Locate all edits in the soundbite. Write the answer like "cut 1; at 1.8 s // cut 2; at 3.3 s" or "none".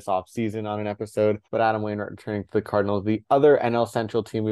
cut 1; at 1.4 s